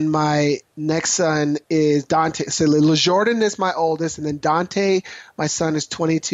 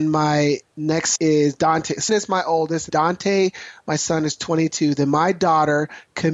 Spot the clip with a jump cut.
second; 3 cuts; at 1.2 s, 2.1 s, 2.9 s

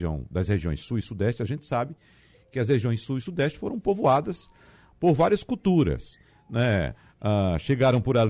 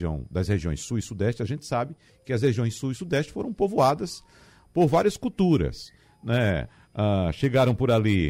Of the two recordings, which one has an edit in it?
second; 1 cut; at 2.1 s

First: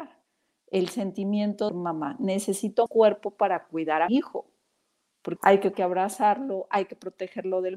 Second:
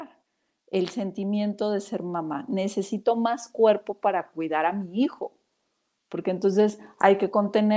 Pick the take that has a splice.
first; 5 cuts; at 1.7 s, 2.9 s, 4.1 s, 5.4 s, 5.7 s

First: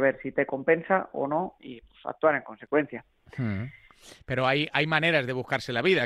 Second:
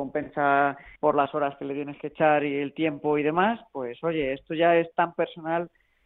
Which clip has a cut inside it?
second; 1 cut; at 1.0 s

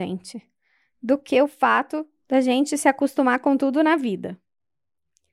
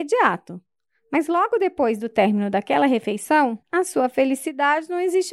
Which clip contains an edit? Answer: second; 1 cut; at 3.6 s

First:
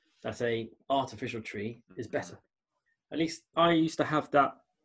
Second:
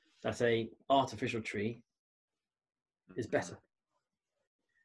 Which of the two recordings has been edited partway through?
first; 3 cuts; at 1.9 s, 2.9 s, 3.5 s

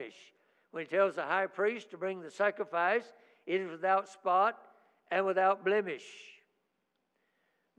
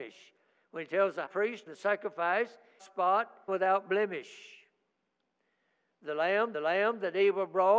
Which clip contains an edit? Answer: second; 5 cuts; at 1.3 s, 1.7 s, 2.8 s, 3.5 s, 6.5 s

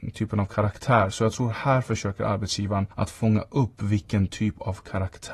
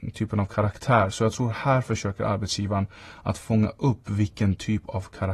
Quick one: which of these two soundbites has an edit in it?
first; 1 cut; at 2.9 s

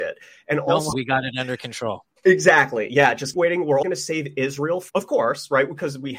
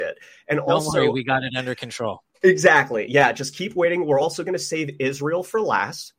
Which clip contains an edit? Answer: first; 4 cuts; at 0.9 s, 3.3 s, 3.8 s, 4.9 s

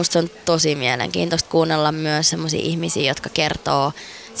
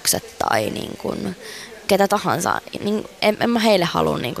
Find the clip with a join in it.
second; 1 cut; at 2.8 s

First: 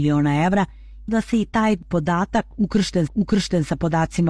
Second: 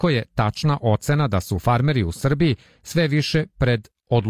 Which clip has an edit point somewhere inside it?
first; 2 cuts; at 1.1 s, 3.1 s

